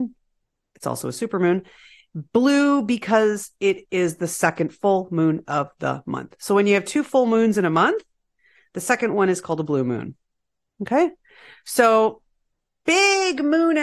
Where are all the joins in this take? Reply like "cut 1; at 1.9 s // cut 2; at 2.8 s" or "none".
none